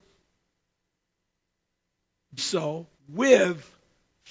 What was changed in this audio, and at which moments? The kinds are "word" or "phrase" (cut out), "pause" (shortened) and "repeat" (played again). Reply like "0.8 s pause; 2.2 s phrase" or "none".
2.4 s word; 3.0 s pause